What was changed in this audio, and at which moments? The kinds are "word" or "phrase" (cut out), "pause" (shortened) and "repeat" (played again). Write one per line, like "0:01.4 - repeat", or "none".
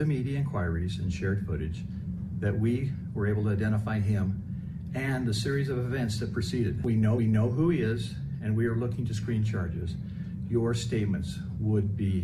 0:07.2 - repeat